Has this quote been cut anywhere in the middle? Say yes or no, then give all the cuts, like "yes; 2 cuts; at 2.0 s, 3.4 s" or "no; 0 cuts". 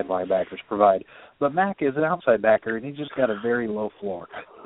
no; 0 cuts